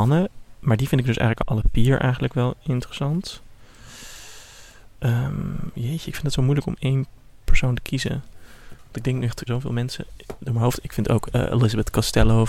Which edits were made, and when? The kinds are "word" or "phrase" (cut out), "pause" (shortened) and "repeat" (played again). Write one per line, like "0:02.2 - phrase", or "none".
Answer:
0:09.5 - word